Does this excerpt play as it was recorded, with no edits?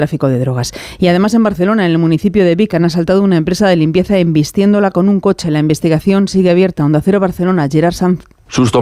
yes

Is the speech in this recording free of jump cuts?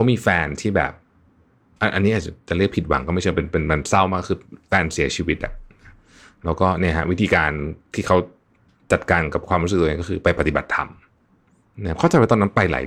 yes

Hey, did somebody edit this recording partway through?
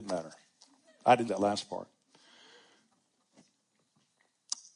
yes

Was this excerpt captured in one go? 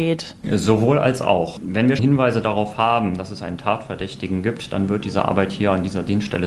no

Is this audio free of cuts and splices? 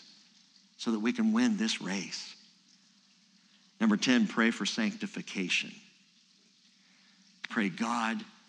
yes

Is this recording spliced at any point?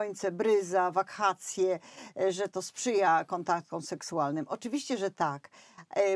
no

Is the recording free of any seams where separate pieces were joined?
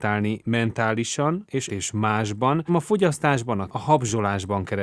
no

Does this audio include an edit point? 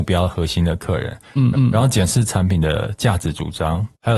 yes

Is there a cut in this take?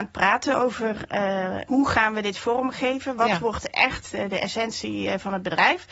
no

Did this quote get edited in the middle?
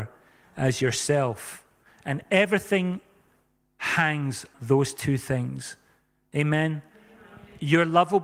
yes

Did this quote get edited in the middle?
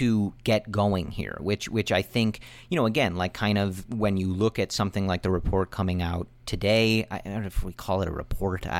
no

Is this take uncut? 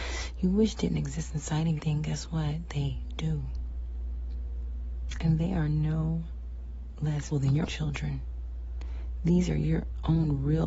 no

